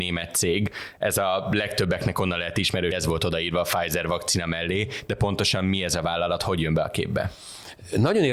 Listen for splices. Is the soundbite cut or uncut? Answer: cut